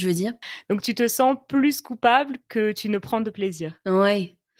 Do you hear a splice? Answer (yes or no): no